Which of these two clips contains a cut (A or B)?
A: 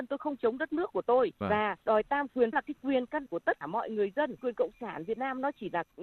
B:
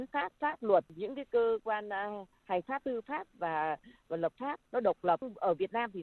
A